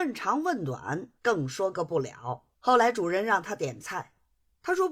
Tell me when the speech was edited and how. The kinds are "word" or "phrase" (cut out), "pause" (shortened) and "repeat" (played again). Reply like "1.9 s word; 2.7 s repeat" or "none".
1.2 s pause; 2.5 s pause